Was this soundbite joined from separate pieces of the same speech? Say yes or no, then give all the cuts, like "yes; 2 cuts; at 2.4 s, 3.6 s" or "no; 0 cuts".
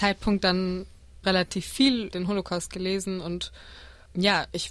yes; 2 cuts; at 1.2 s, 2.1 s